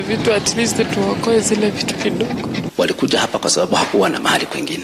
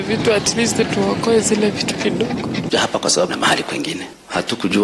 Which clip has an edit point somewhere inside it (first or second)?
second